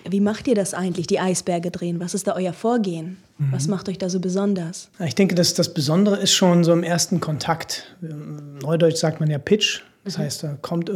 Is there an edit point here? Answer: yes; 1 cut; at 4.9 s

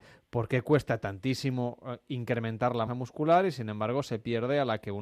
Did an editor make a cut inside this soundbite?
yes; 1 cut; at 2.9 s

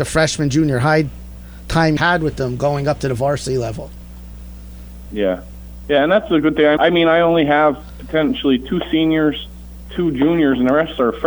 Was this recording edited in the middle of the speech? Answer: yes; 2 cuts; at 2.0 s, 6.8 s

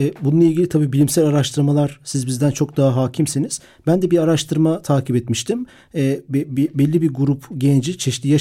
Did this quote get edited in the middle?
no; 0 cuts

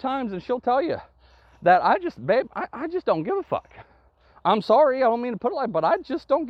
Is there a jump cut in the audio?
yes; 1 cut; at 2.5 s

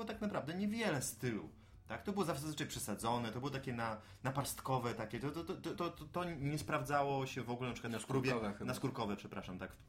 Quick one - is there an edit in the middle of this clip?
yes; 1 cut; at 5.7 s

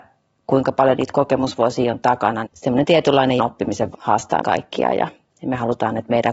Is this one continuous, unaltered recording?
no; 4 cuts; at 2.4 s, 3.4 s, 3.9 s, 4.4 s

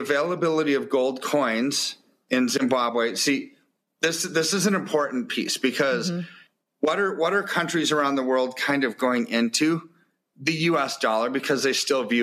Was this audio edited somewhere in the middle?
no; 0 cuts

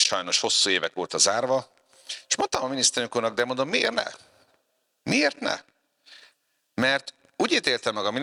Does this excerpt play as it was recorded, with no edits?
yes; 0 cuts

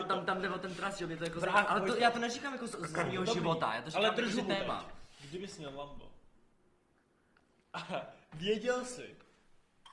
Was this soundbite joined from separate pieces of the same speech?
no; 0 cuts

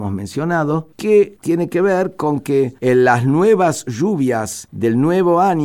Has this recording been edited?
no; 0 cuts

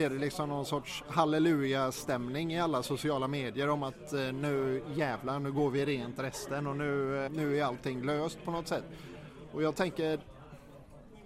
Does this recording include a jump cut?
yes; 1 cut; at 7.3 s

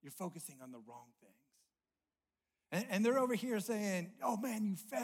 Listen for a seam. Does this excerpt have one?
no; 0 cuts

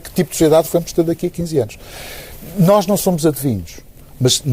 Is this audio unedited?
yes; 0 cuts

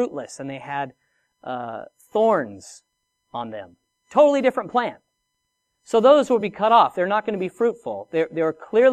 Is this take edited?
no; 0 cuts

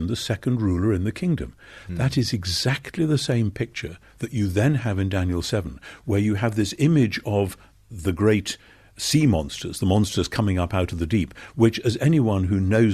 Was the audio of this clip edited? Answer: no; 0 cuts

